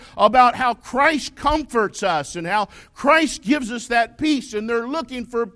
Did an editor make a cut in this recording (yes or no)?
no